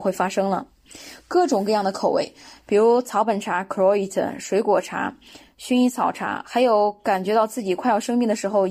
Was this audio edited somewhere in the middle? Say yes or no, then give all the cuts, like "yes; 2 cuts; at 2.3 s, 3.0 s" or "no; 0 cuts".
no; 0 cuts